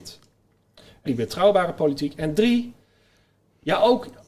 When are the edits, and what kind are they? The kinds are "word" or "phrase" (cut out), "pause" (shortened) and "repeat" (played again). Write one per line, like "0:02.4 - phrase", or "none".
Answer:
0:01.1 - phrase